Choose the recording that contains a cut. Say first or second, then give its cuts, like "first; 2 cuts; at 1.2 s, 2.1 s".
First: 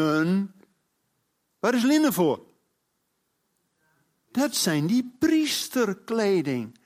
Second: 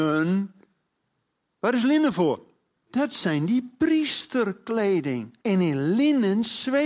second; 2 cuts; at 2.8 s, 5.4 s